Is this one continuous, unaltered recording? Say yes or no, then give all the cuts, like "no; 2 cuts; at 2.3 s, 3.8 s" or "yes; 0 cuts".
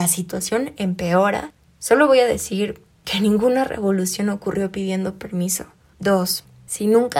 yes; 0 cuts